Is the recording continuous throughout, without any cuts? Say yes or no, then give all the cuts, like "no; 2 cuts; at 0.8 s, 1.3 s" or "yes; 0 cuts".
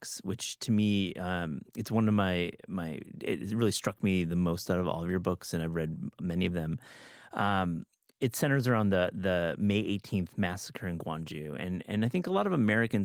yes; 0 cuts